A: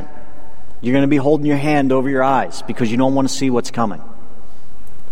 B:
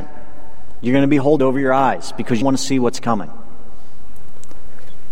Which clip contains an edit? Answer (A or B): B